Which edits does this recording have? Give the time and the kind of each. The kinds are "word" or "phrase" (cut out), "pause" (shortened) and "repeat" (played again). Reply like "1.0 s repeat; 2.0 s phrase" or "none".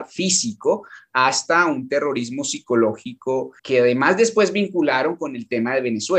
3.6 s word